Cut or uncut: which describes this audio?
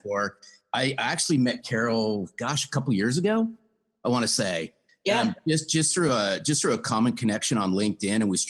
uncut